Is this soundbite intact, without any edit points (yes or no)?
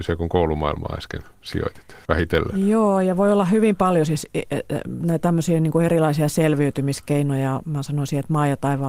no